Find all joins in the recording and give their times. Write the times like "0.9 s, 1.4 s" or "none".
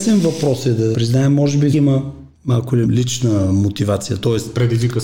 0.9 s, 1.7 s, 2.3 s, 2.8 s